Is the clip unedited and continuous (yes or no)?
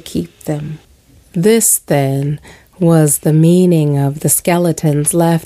yes